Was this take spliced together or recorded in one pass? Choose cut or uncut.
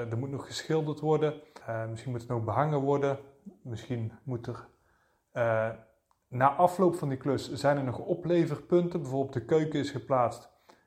cut